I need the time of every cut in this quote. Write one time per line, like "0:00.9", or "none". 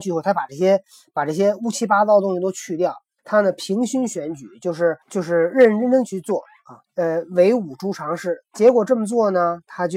0:03.2
0:05.0
0:06.8